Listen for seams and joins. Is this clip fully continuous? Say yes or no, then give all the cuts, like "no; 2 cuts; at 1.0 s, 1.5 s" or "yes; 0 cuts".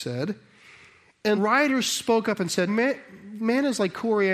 no; 2 cuts; at 1.4 s, 2.7 s